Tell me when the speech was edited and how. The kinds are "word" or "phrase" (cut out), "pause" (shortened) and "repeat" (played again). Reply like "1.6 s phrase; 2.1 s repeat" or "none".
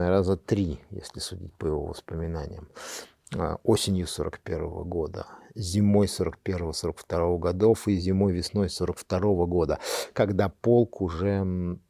none